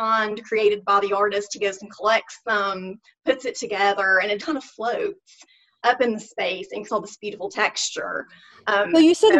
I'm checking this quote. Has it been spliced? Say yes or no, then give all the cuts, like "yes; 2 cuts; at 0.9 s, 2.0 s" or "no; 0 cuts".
yes; 2 cuts; at 4.4 s, 6.9 s